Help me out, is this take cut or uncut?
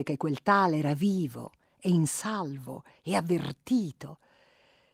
uncut